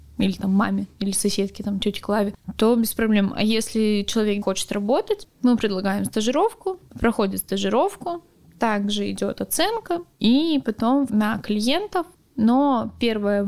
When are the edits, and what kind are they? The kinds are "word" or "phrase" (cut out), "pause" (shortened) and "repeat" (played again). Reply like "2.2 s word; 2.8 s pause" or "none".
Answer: 4.4 s word; 6.9 s pause; 10.1 s pause; 11.1 s word